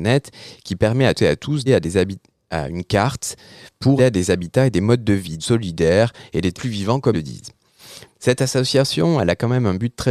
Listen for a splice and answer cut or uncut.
cut